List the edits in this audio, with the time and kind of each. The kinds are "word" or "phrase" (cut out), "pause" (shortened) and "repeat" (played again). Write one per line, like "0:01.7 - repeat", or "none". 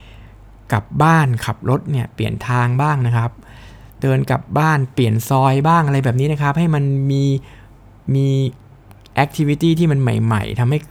0:03.9 - pause